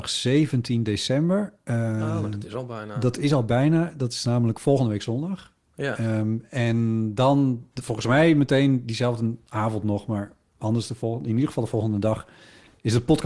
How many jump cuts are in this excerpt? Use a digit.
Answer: 1